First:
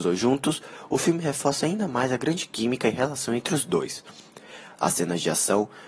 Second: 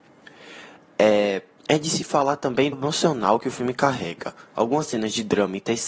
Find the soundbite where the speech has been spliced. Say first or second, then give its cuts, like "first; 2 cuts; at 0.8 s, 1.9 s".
second; 1 cut; at 2.7 s